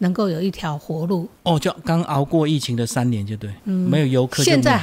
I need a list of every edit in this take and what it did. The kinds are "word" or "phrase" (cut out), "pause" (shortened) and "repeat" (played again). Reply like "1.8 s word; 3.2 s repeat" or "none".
1.4 s pause; 3.6 s pause

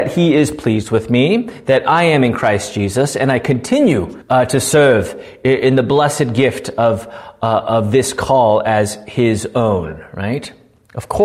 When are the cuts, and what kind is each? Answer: 4.2 s pause

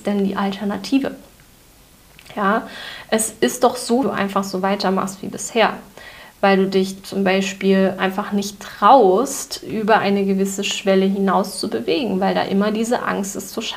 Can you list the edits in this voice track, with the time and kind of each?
4.0 s phrase

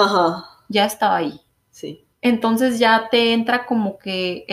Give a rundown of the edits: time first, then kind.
2.1 s pause

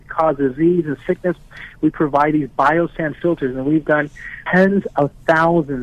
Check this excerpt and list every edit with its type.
4.5 s word

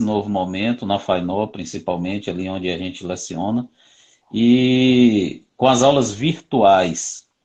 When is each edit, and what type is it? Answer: none

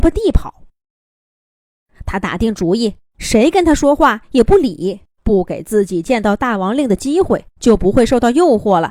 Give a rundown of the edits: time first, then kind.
3.0 s pause; 5.1 s pause; 7.5 s pause

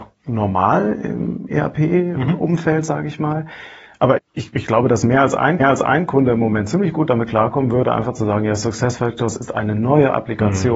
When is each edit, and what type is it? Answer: 4.2 s word; 5.6 s repeat

